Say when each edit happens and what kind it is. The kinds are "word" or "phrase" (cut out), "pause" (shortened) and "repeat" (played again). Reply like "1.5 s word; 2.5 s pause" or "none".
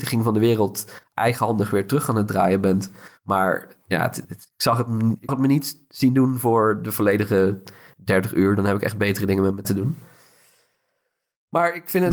4.2 s word; 5.3 s word; 9.6 s word

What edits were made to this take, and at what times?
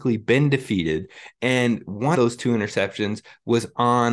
2.1 s word

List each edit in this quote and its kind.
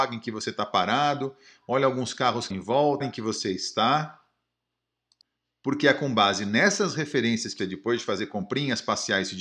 2.5 s word; 3.0 s phrase; 7.6 s word

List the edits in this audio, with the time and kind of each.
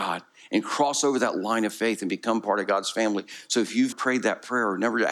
3.9 s word

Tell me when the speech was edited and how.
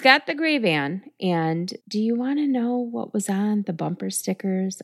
1.8 s pause

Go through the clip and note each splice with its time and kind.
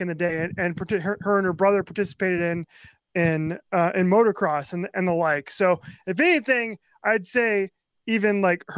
none

